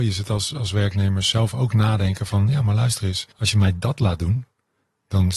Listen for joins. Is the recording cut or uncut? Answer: cut